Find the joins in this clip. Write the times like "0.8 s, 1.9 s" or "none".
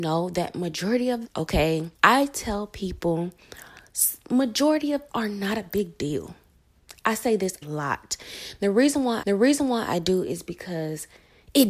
1.2 s, 1.9 s, 5.1 s, 7.6 s, 9.2 s